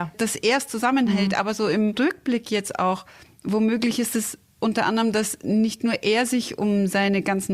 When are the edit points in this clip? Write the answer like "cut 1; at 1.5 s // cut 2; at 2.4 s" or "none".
none